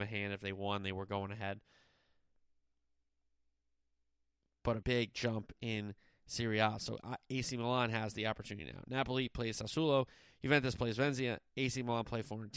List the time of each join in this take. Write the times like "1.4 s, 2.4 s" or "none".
4.8 s